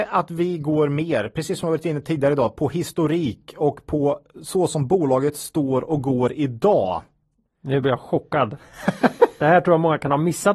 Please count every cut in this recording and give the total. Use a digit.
0